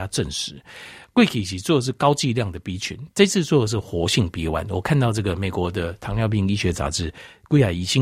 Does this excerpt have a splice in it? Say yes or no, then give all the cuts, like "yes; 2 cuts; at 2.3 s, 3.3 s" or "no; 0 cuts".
no; 0 cuts